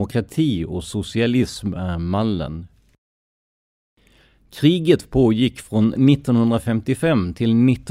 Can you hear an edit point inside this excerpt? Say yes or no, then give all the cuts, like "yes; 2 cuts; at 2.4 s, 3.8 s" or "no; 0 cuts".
no; 0 cuts